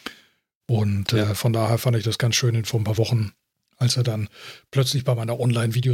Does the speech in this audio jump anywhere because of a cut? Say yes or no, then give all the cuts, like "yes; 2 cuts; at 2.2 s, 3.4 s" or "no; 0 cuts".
no; 0 cuts